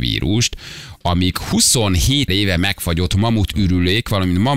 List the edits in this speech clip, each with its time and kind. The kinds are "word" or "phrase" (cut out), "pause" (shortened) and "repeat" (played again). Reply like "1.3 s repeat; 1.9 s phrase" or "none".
2.3 s word